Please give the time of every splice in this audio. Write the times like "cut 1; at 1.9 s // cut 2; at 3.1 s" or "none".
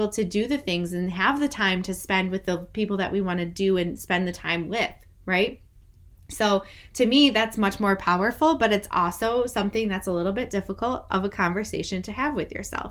none